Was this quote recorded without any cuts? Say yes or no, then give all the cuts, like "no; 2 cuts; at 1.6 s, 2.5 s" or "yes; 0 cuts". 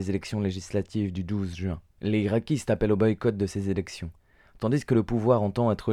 no; 1 cut; at 1.9 s